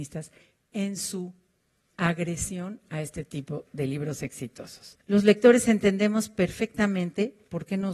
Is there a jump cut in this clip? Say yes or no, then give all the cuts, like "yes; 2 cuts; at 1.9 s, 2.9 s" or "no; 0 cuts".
yes; 1 cut; at 5.0 s